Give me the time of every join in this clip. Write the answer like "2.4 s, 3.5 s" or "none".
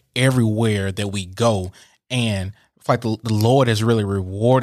none